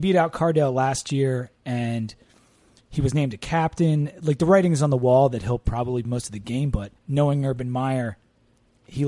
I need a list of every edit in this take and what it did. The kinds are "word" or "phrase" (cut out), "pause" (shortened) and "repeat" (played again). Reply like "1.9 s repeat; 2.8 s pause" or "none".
6.0 s word; 7.0 s pause